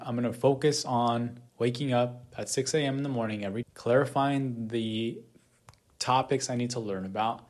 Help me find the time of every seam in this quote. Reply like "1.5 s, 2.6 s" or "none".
1.5 s, 3.6 s